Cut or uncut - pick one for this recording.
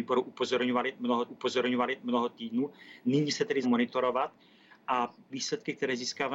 cut